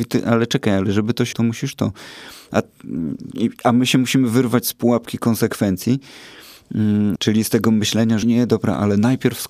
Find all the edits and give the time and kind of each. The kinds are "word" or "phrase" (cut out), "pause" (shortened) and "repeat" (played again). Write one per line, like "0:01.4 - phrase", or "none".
0:01.3 - word
0:07.2 - word
0:08.2 - word